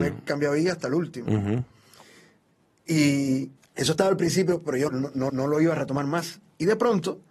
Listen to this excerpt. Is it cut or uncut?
cut